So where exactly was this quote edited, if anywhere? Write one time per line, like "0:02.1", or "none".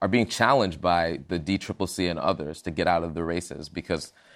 none